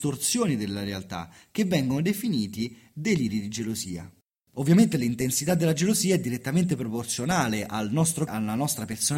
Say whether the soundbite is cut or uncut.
cut